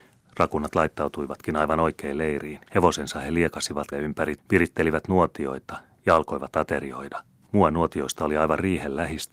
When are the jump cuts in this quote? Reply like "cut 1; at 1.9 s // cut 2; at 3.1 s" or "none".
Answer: cut 1; at 2.7 s // cut 2; at 3.9 s // cut 3; at 4.4 s // cut 4; at 7.4 s